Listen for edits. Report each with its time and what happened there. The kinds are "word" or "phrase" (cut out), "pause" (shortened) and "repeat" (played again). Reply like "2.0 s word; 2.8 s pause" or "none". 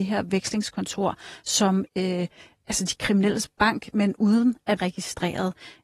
1.9 s word; 4.8 s word